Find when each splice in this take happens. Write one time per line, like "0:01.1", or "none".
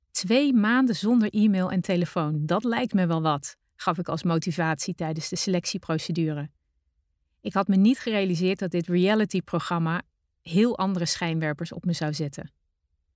none